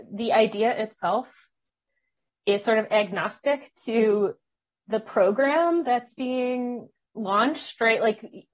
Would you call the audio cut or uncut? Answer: uncut